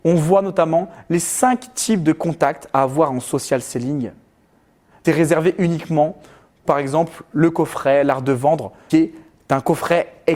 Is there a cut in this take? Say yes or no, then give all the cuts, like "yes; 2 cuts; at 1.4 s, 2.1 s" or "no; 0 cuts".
yes; 3 cuts; at 5.0 s, 6.6 s, 8.9 s